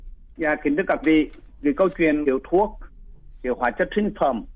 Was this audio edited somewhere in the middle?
yes; 2 cuts; at 1.0 s, 2.2 s

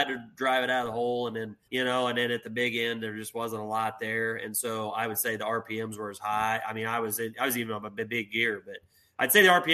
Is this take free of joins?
no; 1 cut; at 1.6 s

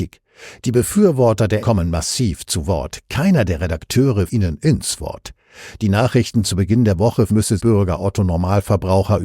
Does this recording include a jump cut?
yes; 4 cuts; at 1.6 s, 4.3 s, 7.3 s, 7.6 s

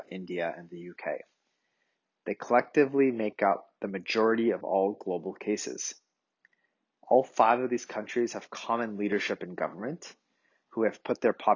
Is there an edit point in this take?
no; 0 cuts

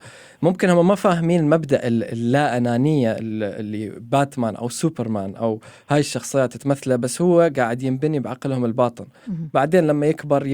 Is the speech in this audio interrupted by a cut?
no; 0 cuts

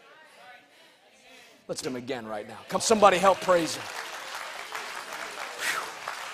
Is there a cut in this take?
yes; 3 cuts; at 1.8 s, 2.8 s, 3.4 s

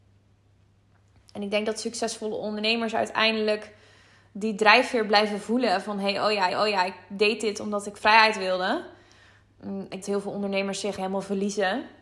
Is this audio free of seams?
no; 3 cuts; at 6.5 s, 10.0 s, 11.0 s

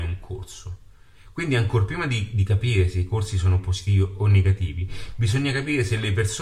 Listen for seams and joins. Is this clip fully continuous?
yes; 0 cuts

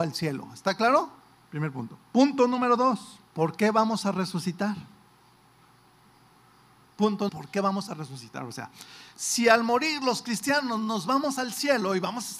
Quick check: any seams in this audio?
yes; 3 cuts; at 1.4 s, 3.3 s, 7.3 s

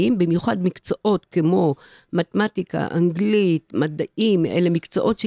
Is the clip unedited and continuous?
yes; 0 cuts

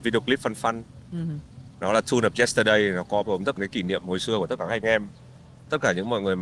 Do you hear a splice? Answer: yes; 2 cuts; at 3.2 s, 3.6 s

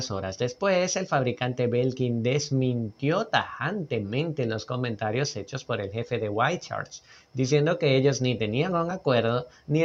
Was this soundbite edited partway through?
no; 0 cuts

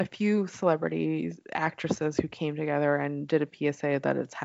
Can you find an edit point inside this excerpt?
no; 0 cuts

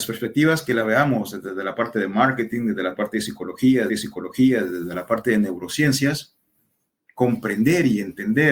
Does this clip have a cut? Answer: yes; 1 cut; at 3.9 s

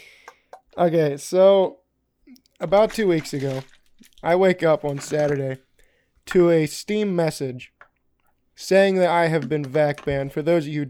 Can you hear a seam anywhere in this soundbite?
no; 0 cuts

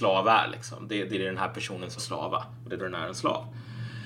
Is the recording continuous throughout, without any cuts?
no; 3 cuts; at 1.1 s, 2.0 s, 2.8 s

